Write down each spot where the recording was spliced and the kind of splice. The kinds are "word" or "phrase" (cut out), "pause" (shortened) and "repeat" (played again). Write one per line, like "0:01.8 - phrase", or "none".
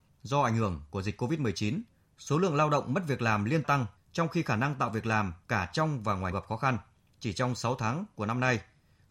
0:03.6 - phrase
0:05.4 - pause
0:06.3 - phrase